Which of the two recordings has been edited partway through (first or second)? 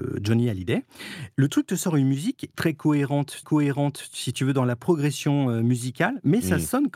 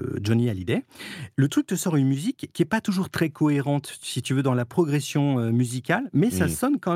first